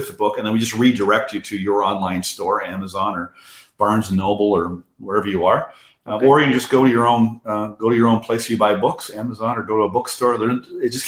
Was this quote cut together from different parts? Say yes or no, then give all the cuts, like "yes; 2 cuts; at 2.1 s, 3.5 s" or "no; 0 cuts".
no; 0 cuts